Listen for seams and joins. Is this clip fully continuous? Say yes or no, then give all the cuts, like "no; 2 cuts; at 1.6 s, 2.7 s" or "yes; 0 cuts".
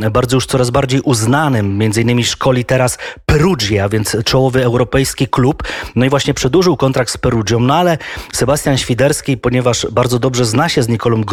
yes; 0 cuts